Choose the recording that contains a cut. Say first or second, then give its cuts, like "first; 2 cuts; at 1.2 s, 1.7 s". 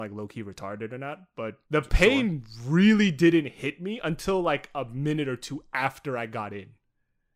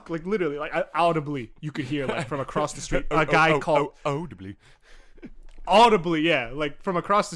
first; 1 cut; at 1.7 s